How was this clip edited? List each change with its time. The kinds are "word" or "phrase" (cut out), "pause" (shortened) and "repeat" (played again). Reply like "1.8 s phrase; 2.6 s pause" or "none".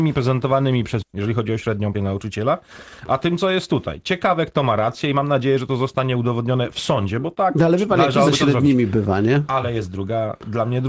1.0 s word; 1.9 s word